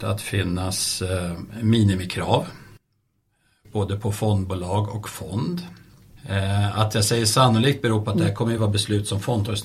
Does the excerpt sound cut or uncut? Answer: uncut